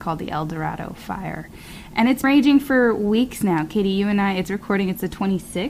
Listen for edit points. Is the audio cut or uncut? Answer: cut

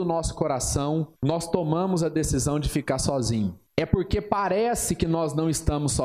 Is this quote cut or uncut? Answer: cut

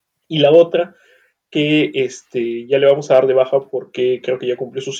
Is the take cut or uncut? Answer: uncut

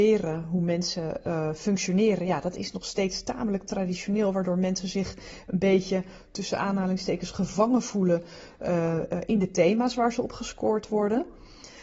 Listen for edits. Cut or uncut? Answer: uncut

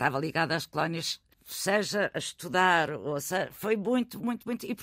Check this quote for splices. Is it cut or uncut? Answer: cut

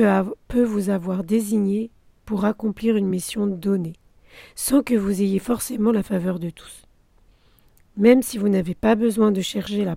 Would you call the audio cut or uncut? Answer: uncut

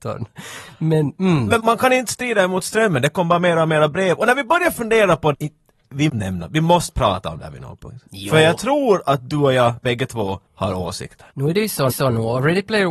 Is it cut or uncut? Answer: cut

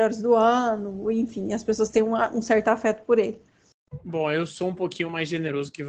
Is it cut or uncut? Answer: uncut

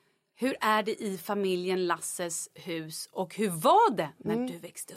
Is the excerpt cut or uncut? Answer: uncut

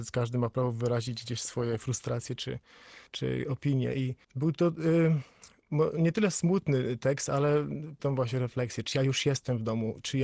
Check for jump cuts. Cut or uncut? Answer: cut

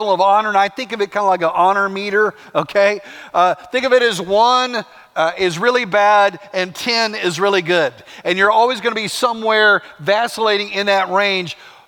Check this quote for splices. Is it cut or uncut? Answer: uncut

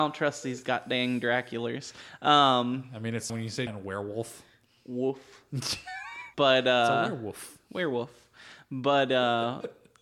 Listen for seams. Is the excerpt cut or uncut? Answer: cut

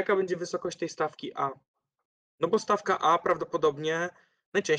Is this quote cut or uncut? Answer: uncut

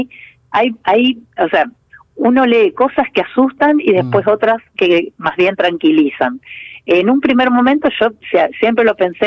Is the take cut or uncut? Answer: uncut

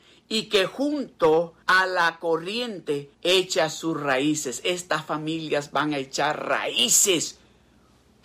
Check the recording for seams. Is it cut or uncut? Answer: cut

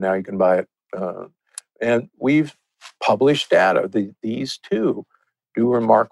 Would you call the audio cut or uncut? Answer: uncut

